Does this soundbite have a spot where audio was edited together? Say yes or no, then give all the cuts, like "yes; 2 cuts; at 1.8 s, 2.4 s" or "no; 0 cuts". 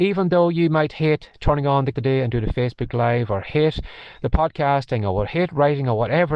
yes; 1 cut; at 1.9 s